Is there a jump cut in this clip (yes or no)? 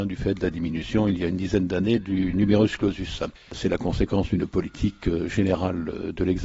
no